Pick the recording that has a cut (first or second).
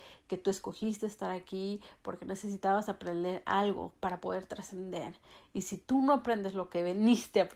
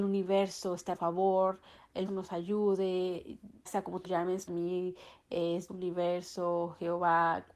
second